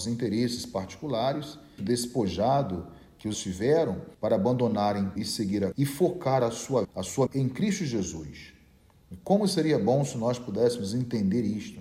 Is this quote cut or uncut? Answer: cut